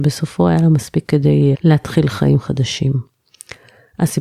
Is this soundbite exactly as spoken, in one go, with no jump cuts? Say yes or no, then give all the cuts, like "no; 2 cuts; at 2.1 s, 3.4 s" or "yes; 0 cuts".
no; 2 cuts; at 1.1 s, 1.5 s